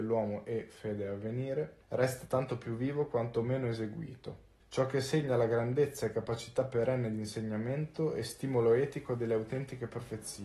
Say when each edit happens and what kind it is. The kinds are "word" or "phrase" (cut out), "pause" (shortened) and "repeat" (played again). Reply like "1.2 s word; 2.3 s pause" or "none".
1.8 s pause; 4.6 s pause